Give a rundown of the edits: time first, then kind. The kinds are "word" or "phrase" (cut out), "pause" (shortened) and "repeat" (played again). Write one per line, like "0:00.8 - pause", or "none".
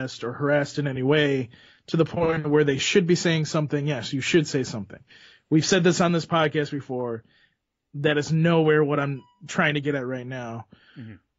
none